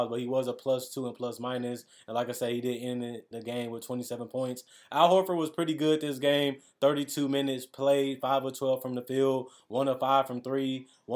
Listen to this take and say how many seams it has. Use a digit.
1